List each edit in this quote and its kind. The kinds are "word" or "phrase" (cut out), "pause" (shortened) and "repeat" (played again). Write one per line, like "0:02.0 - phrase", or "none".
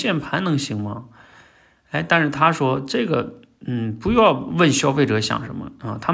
none